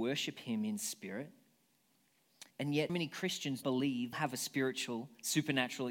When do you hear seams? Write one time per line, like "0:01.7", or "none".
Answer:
0:02.5
0:02.9
0:03.6
0:04.1